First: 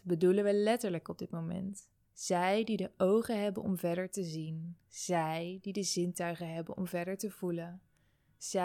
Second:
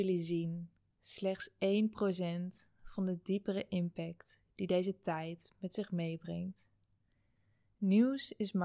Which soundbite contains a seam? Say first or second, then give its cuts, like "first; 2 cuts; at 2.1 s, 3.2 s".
first; 2 cuts; at 2.1 s, 4.9 s